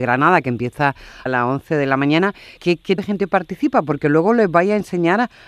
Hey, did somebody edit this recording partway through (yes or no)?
yes